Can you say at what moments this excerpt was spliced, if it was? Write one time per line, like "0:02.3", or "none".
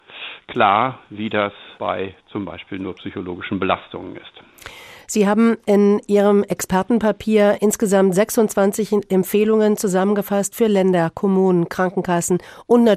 0:01.8